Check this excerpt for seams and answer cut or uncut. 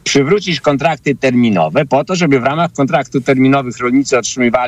uncut